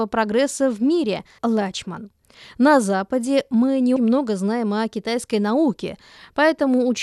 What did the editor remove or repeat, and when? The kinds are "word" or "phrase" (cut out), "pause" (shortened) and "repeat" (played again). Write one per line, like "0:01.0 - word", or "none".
0:01.4 - word
0:04.0 - word